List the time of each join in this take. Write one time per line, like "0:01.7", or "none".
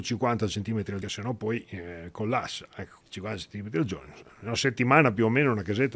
0:01.0
0:03.0